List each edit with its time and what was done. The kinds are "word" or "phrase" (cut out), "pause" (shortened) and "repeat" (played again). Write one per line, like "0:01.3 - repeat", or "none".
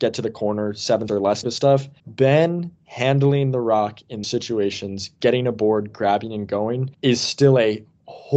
0:01.1 - word
0:01.4 - word
0:02.0 - pause
0:04.2 - word
0:06.9 - pause